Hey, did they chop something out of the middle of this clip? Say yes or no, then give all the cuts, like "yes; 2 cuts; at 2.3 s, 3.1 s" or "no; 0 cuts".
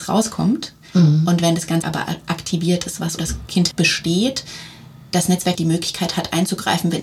yes; 4 cuts; at 1.8 s, 3.2 s, 3.7 s, 5.5 s